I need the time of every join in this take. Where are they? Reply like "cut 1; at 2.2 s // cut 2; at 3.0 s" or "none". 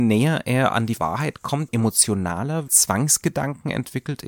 cut 1; at 1.0 s // cut 2; at 1.7 s // cut 3; at 2.7 s

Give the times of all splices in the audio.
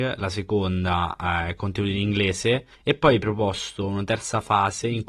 cut 1; at 2.8 s

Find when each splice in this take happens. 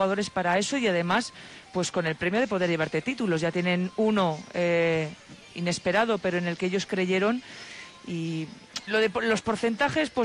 cut 1; at 1.7 s // cut 2; at 8.9 s

